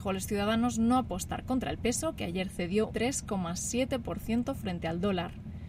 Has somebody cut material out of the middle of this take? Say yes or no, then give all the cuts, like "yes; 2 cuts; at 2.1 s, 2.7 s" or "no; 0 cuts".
yes; 1 cut; at 2.9 s